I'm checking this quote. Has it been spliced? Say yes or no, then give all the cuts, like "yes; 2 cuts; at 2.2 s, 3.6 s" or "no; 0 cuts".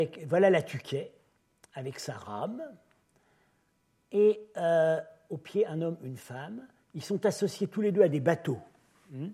no; 0 cuts